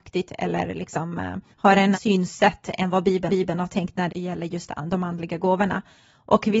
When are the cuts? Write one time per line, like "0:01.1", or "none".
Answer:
0:01.5
0:01.9
0:03.3
0:04.1